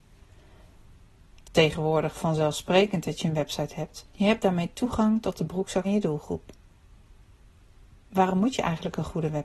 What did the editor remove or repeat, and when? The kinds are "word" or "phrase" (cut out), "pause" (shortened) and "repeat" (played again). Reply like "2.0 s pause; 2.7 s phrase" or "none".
1.4 s word; 4.1 s pause; 5.8 s word